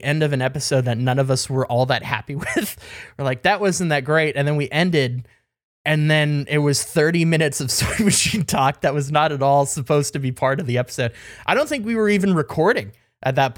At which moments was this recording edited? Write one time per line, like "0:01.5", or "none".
none